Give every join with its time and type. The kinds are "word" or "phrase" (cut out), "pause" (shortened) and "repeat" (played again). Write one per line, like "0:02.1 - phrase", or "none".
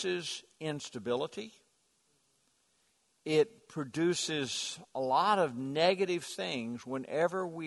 none